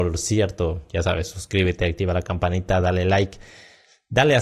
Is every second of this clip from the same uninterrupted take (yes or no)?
yes